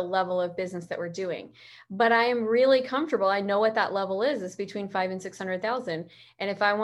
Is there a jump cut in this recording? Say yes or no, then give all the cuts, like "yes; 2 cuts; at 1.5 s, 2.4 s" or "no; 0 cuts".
no; 0 cuts